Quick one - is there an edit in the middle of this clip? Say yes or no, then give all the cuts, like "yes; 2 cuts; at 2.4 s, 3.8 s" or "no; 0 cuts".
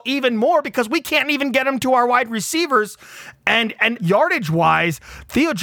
yes; 1 cut; at 4.0 s